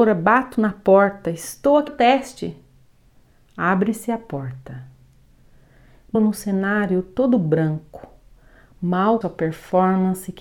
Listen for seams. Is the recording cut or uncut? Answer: cut